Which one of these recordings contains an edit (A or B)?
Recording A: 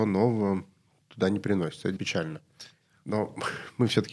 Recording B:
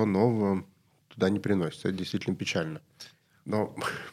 A